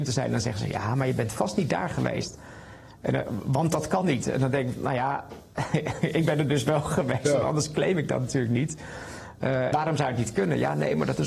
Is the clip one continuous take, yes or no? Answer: no